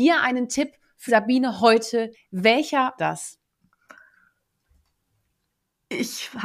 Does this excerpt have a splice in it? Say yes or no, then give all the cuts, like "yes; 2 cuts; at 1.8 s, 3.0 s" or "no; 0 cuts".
yes; 3 cuts; at 1.1 s, 2.1 s, 3.0 s